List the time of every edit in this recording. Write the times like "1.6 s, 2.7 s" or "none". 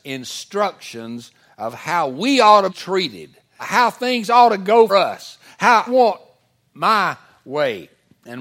2.7 s, 3.6 s, 4.9 s, 5.9 s